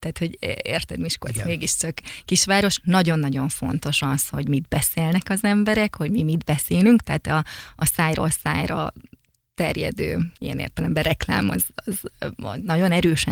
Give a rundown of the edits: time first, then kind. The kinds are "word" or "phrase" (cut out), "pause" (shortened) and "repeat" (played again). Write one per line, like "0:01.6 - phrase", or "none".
0:10.4 - pause

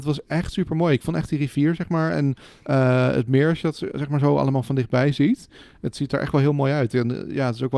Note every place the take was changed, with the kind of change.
none

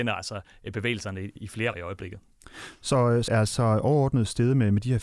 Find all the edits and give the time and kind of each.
0:01.4 - word
0:01.7 - word
0:03.3 - word

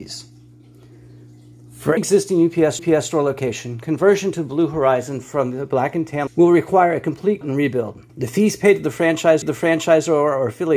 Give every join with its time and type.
0:02.0 - word
0:02.8 - repeat
0:06.3 - word
0:07.4 - word
0:08.1 - pause
0:09.4 - repeat

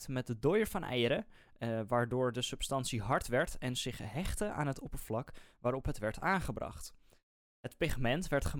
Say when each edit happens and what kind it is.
none

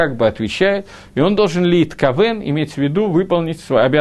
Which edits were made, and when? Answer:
none

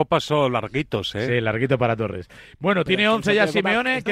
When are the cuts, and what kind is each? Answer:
none

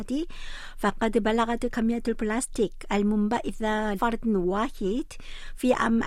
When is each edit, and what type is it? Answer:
0:03.9 - word

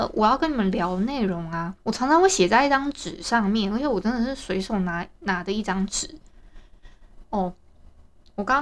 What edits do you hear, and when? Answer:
0:01.8 - pause

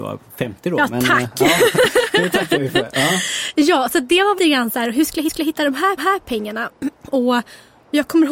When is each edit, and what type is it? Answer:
0:04.4 - word
0:05.3 - repeat
0:06.0 - repeat

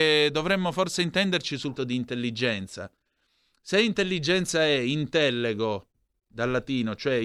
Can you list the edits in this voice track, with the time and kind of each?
0:01.8 - word

